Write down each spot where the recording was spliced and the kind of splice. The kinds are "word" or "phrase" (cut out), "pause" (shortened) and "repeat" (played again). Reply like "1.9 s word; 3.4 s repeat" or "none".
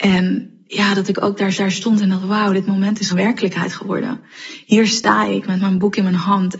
1.6 s repeat; 3.1 s word

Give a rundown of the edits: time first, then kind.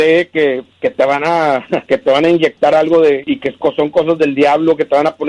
none

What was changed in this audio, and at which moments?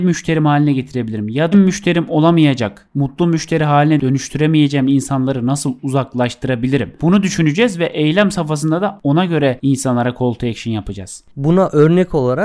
1.5 s phrase

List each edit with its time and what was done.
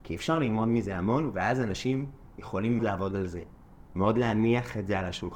2.8 s word

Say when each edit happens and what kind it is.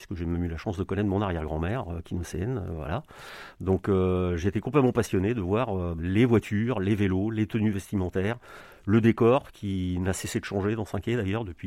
6.0 s word

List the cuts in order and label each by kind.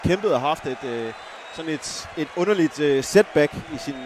none

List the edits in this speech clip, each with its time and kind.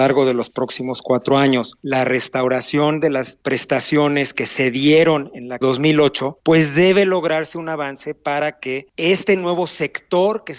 5.6 s phrase

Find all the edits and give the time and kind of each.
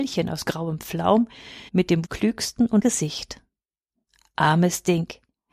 1.7 s pause; 2.0 s word; 2.8 s word

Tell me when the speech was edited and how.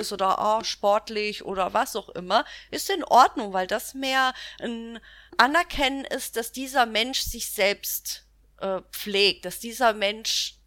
5.3 s pause; 8.4 s pause

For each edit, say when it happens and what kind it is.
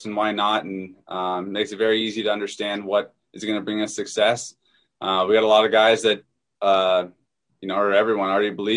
none

